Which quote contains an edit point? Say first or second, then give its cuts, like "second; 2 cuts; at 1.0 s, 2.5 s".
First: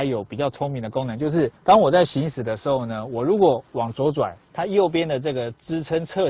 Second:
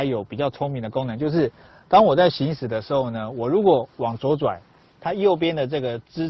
first; 2 cuts; at 1.6 s, 4.4 s